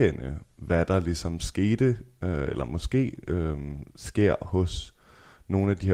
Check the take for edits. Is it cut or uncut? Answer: uncut